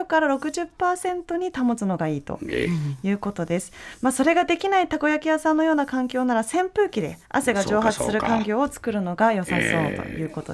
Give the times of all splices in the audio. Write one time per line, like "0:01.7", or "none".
0:07.2